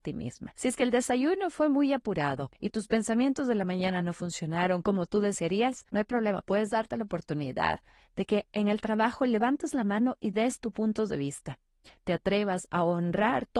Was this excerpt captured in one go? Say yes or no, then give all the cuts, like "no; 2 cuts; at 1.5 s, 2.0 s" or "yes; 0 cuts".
yes; 0 cuts